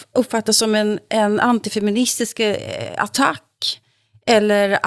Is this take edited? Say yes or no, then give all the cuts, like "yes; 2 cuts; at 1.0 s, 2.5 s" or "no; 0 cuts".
no; 0 cuts